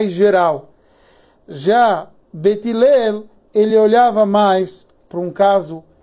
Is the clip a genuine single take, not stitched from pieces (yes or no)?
yes